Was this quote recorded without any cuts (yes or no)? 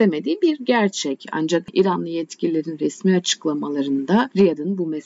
yes